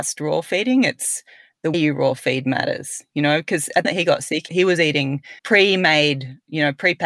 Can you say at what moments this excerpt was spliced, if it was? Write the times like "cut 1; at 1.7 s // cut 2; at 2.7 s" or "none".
cut 1; at 1.7 s // cut 2; at 3.8 s // cut 3; at 5.4 s